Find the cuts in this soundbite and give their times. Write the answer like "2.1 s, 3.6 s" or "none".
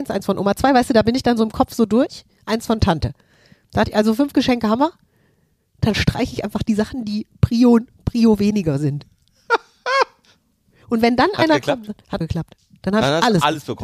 12.2 s